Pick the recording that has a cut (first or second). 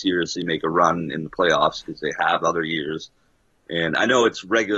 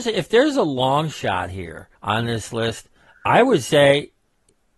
second